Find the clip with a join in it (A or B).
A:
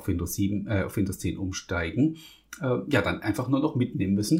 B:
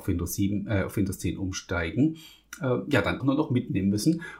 B